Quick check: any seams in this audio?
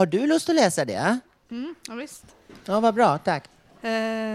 no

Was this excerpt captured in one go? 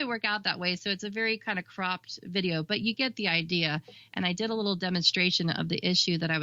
yes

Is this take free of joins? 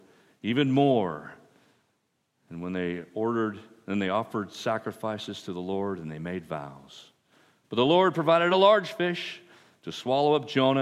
yes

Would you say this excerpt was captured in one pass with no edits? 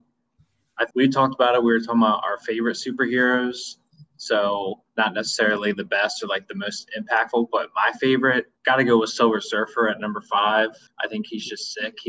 no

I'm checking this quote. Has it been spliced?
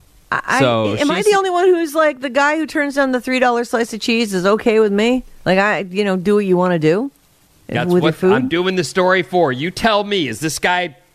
no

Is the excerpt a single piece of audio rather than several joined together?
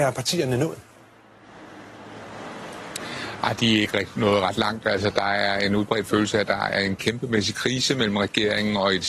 yes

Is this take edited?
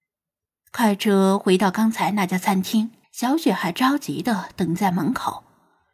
yes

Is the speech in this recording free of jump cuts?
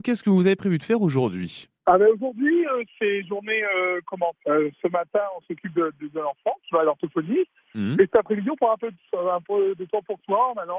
no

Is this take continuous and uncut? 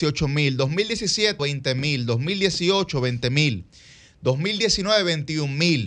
no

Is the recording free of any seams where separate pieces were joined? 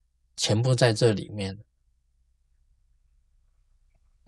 yes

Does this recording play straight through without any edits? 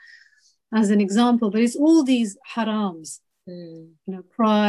yes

